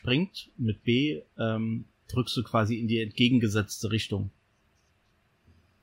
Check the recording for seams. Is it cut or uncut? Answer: uncut